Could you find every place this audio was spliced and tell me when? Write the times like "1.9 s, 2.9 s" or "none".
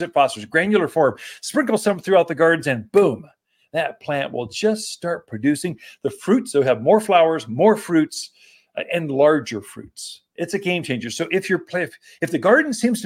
none